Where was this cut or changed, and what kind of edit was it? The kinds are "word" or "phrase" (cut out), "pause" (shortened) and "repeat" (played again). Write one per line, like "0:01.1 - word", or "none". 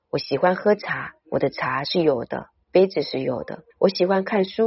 0:03.7 - pause